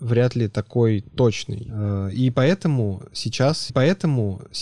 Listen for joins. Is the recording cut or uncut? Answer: cut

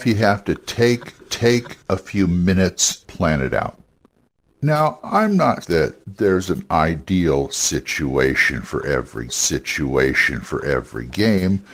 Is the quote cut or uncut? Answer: cut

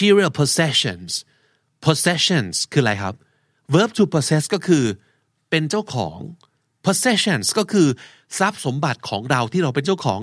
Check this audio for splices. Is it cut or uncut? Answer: uncut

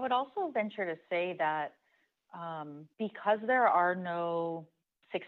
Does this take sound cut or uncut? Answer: cut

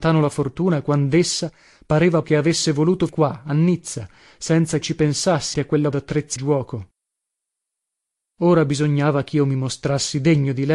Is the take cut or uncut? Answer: cut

